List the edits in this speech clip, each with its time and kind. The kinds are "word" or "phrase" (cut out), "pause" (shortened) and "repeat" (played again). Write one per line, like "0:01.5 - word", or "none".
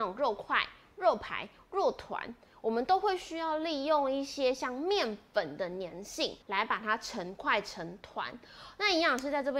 0:06.4 - pause